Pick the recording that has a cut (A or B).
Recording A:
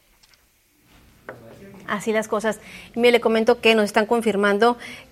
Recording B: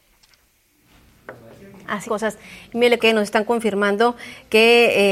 B